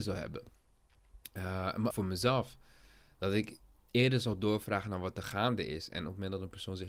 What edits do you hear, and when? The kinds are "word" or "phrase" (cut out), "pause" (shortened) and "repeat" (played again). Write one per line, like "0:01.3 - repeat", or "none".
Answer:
0:01.9 - word